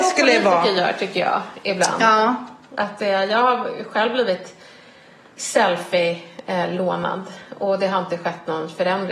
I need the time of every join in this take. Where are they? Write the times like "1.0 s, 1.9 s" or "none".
none